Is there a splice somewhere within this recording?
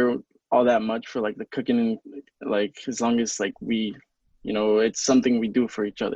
no; 0 cuts

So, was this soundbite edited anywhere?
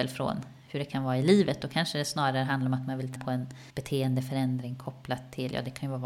yes; 2 cuts; at 3.2 s, 3.7 s

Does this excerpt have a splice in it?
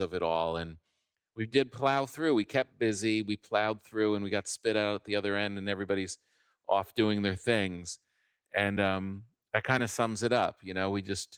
no; 0 cuts

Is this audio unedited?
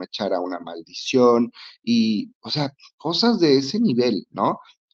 yes; 0 cuts

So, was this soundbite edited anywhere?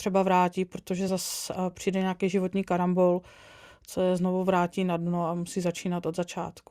no; 0 cuts

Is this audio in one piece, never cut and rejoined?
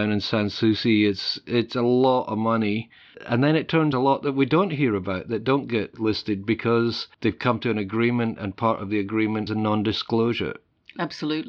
no; 2 cuts; at 3.9 s, 9.5 s

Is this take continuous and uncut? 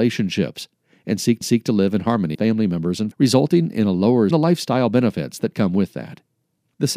no; 4 cuts; at 1.4 s, 2.3 s, 3.1 s, 4.3 s

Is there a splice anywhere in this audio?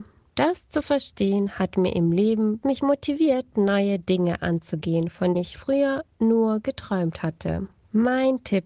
yes; 2 cuts; at 2.6 s, 5.3 s

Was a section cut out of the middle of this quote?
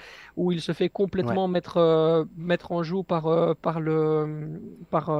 no; 0 cuts

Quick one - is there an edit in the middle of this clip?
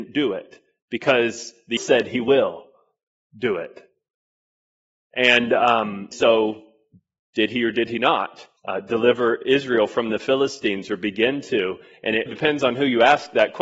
yes; 4 cuts; at 1.8 s, 6.1 s, 8.6 s, 12.3 s

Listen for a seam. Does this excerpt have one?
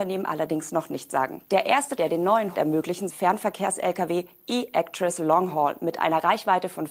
yes; 4 cuts; at 1.4 s, 2.0 s, 2.5 s, 3.1 s

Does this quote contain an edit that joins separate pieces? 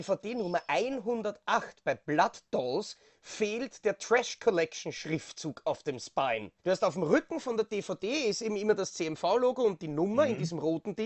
yes; 1 cut; at 6.6 s

